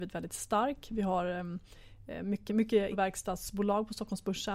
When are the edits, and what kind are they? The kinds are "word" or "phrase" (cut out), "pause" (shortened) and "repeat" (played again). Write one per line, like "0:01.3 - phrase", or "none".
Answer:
0:02.5 - word
0:02.9 - word

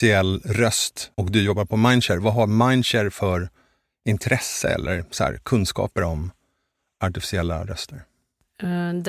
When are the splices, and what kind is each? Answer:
0:01.1 - pause

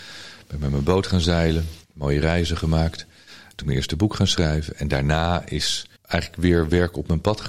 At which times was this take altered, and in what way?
0:01.8 - pause
0:03.6 - word
0:06.0 - pause

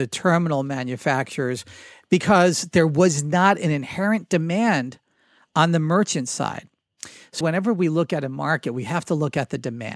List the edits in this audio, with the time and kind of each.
0:07.4 - word

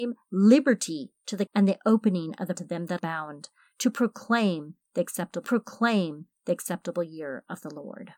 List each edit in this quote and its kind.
0:01.5 - word
0:02.5 - word
0:03.0 - word
0:05.4 - repeat

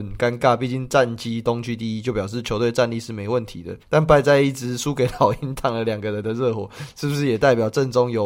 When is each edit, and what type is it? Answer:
0:03.8 - pause

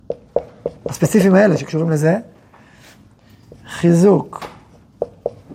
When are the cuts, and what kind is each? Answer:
none

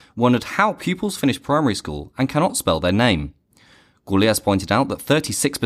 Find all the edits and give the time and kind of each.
none

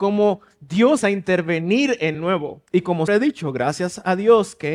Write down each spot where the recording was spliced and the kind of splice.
0:01.0 - word
0:02.1 - phrase
0:02.7 - pause
0:03.1 - word

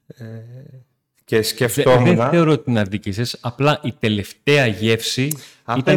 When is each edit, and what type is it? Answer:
none

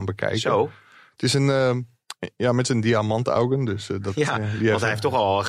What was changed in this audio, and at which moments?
none

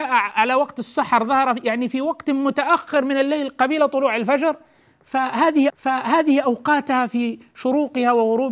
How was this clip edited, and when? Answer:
0:05.7 - repeat

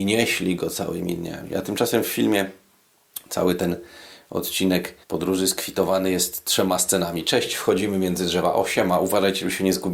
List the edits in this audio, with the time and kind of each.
0:05.0 - pause

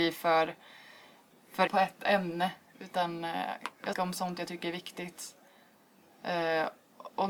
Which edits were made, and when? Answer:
0:01.7 - word
0:03.9 - phrase

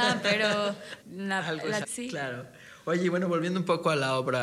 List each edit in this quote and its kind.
0:01.0 - phrase
0:01.8 - phrase

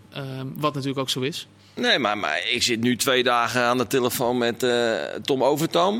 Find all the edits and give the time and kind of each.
none

